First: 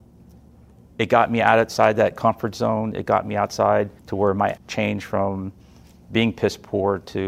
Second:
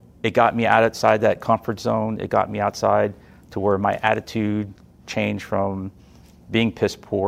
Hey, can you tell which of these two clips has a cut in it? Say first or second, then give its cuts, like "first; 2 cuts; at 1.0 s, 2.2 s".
first; 2 cuts; at 4.0 s, 4.6 s